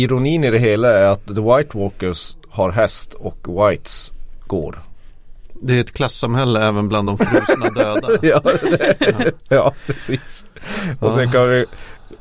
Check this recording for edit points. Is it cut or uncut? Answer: uncut